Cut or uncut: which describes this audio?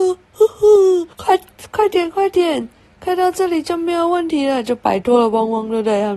cut